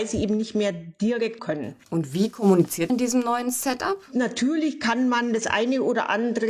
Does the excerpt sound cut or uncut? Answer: cut